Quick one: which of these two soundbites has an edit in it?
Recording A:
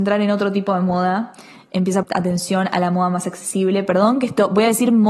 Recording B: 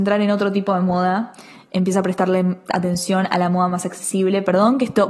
A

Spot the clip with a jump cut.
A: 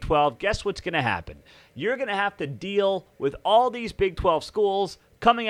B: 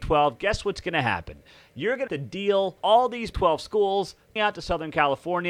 B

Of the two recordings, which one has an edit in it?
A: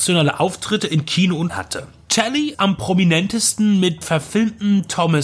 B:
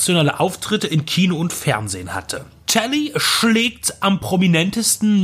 A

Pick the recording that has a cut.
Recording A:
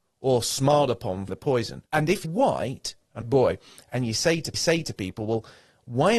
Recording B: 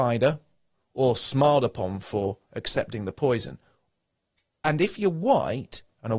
A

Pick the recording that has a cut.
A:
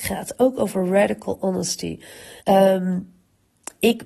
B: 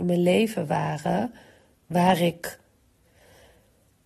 A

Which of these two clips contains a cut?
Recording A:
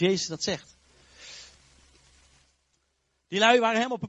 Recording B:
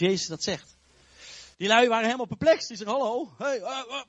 B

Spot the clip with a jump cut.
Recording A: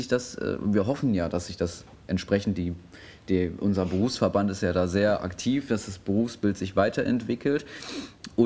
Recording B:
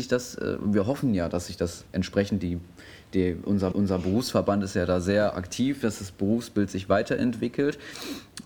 B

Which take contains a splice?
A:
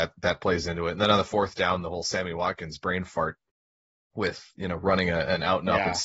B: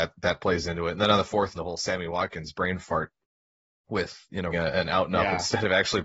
B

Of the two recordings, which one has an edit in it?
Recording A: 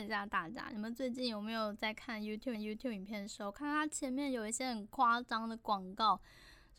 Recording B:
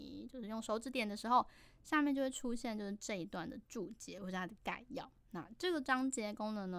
A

